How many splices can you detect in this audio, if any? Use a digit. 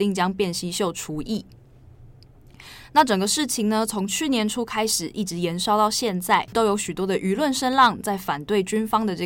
0